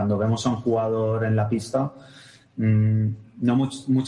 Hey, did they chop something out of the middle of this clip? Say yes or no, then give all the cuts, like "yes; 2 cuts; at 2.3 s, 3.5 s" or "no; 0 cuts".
no; 0 cuts